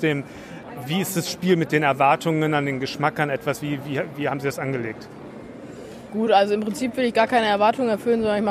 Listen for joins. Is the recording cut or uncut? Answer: uncut